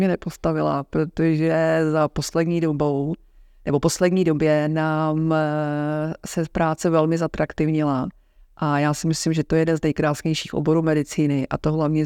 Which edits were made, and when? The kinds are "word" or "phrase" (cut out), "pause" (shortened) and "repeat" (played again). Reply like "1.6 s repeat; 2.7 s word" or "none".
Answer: none